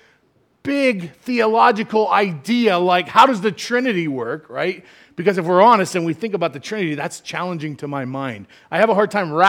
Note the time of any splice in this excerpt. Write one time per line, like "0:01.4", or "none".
none